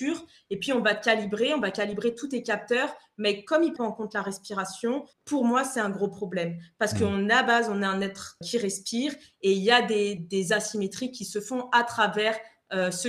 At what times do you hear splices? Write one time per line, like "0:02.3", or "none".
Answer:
0:03.8
0:05.1
0:08.4
0:10.2